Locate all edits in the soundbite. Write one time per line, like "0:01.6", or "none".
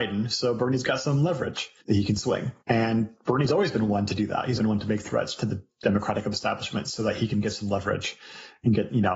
0:01.8
0:02.6
0:04.6